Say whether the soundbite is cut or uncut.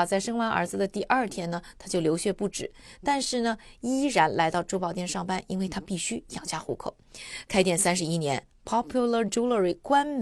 uncut